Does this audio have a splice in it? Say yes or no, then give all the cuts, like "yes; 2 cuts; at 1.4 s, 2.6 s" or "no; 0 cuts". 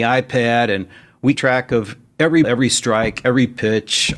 yes; 2 cuts; at 1.3 s, 2.4 s